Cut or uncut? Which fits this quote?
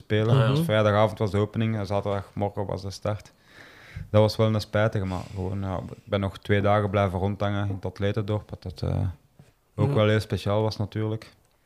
uncut